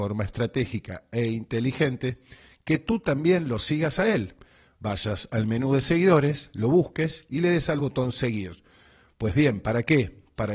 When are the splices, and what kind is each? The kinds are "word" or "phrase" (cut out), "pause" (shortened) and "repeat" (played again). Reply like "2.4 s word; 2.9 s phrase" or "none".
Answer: none